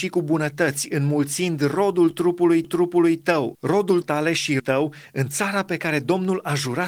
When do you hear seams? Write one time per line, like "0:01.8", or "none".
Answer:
0:02.6
0:04.0
0:04.6